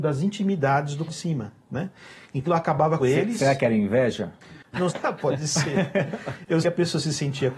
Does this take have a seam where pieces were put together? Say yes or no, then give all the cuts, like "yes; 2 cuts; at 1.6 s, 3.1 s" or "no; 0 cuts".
yes; 6 cuts; at 1.1 s, 1.6 s, 2.5 s, 3.0 s, 4.9 s, 6.6 s